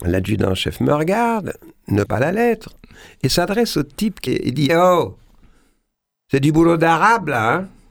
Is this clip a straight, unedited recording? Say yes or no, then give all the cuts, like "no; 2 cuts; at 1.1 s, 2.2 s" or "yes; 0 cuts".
no; 3 cuts; at 2.1 s, 4.3 s, 4.7 s